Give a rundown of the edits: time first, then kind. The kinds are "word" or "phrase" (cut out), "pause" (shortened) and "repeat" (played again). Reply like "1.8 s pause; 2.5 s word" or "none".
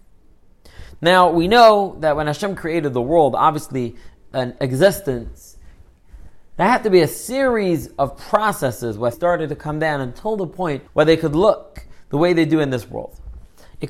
4.6 s word; 9.1 s phrase; 10.9 s pause